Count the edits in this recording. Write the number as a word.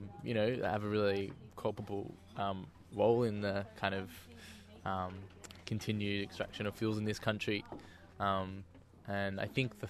one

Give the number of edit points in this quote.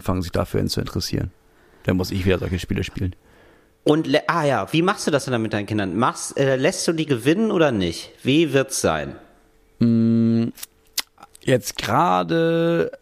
zero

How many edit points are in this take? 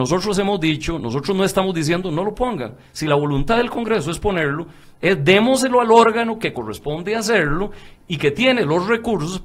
one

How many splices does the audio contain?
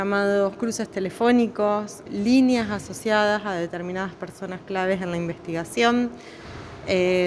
one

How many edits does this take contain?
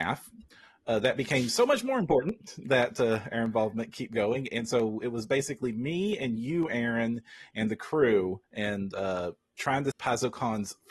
two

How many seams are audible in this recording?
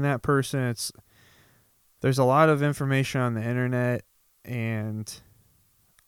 zero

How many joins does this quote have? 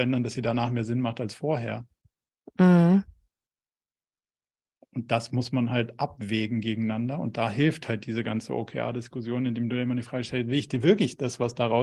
zero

